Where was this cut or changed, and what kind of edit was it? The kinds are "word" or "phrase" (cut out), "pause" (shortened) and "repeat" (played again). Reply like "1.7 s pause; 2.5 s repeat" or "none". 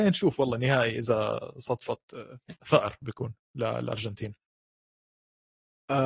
2.6 s pause